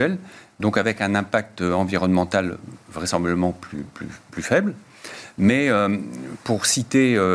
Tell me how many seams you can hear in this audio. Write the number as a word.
zero